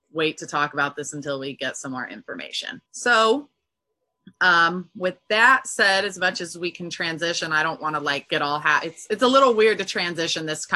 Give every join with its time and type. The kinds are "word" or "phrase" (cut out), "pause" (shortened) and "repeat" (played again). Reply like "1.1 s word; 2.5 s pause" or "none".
2.9 s pause